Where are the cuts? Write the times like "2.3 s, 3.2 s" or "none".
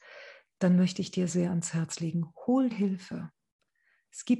1.3 s, 2.7 s